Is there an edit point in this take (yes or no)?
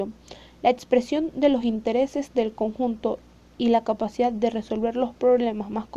no